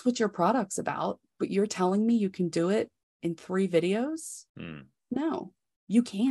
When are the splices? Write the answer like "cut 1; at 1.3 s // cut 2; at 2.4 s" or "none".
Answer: cut 1; at 1.3 s // cut 2; at 3.0 s // cut 3; at 4.5 s